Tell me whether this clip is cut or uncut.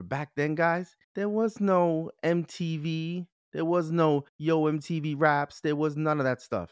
cut